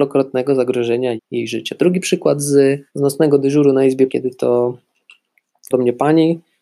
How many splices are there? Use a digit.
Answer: 4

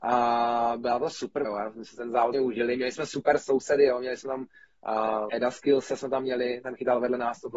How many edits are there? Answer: 3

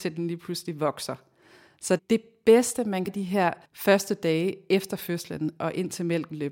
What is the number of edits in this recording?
3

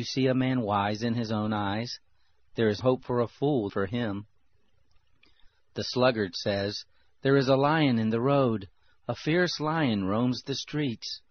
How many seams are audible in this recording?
2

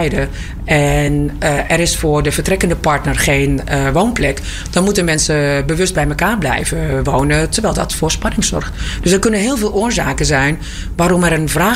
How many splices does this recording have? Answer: 0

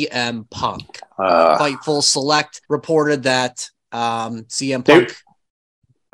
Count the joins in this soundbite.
2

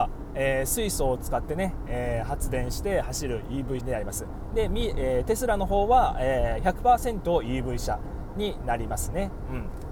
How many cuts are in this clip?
1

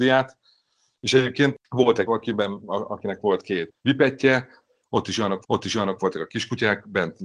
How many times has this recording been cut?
4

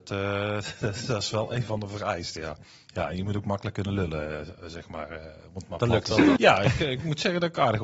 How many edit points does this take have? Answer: 1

